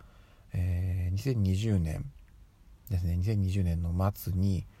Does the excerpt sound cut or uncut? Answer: uncut